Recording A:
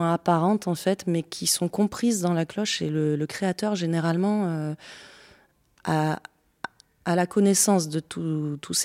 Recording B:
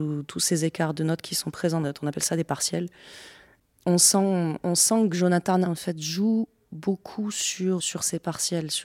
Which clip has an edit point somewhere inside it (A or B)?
B